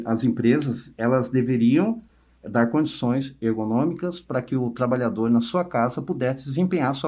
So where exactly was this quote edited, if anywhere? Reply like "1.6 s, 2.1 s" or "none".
none